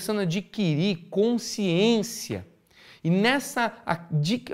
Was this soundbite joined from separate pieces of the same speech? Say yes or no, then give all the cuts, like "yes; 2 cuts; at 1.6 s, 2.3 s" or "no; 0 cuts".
no; 0 cuts